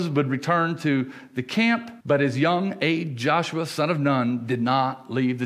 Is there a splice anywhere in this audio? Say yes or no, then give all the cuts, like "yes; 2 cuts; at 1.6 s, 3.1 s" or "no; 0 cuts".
yes; 1 cut; at 2.0 s